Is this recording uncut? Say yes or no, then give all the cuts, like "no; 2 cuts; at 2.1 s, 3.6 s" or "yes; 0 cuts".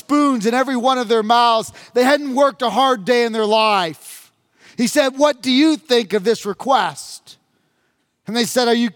yes; 0 cuts